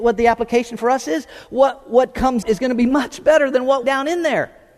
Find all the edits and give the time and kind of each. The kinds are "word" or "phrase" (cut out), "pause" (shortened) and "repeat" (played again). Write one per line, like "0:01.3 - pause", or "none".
0:02.4 - word
0:03.8 - word